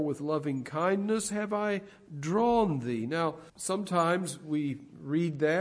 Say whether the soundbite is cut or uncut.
cut